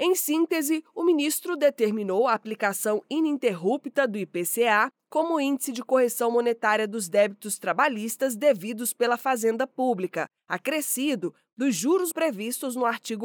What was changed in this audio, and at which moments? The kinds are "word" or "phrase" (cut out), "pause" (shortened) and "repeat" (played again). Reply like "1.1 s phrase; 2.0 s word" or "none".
12.1 s word